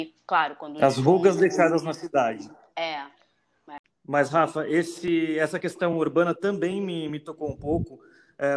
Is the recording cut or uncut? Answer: uncut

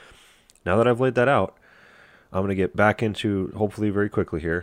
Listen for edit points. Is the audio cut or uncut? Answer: uncut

